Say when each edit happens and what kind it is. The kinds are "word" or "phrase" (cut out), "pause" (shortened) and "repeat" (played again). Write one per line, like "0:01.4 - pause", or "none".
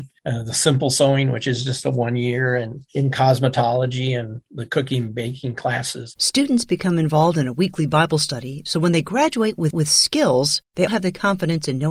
0:09.7 - repeat
0:10.9 - word